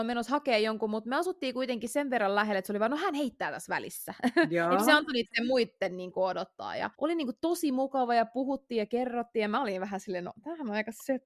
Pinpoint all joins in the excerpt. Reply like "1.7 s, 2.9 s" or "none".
6.9 s